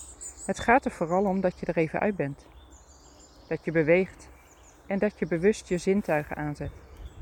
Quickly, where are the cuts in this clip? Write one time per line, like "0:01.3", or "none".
none